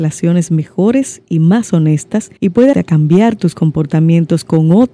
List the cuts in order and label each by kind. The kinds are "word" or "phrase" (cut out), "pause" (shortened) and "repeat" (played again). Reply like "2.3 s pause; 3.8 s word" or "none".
2.4 s pause; 2.7 s word